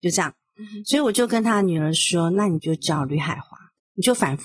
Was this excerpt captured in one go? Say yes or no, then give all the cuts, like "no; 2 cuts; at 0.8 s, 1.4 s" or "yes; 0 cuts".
yes; 0 cuts